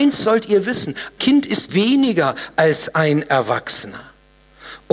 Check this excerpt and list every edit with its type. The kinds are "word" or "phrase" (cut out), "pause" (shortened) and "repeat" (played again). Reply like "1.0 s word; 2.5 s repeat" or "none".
1.2 s word; 1.7 s word